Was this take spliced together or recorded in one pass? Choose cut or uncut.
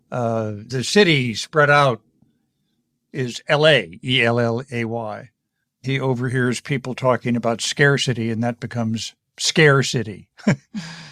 uncut